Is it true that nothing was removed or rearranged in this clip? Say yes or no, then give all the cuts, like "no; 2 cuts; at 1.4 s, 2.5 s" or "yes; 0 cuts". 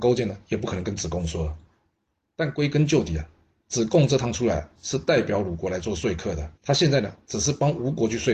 no; 1 cut; at 6.6 s